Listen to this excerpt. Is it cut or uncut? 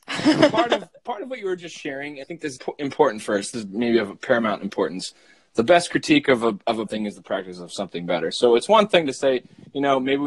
cut